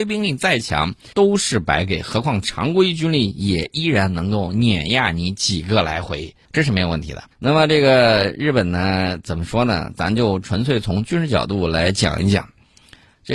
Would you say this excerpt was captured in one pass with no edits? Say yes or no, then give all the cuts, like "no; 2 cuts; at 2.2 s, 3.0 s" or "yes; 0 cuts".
no; 3 cuts; at 1.1 s, 6.4 s, 7.3 s